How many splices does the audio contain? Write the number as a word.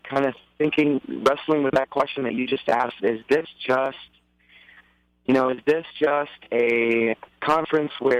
one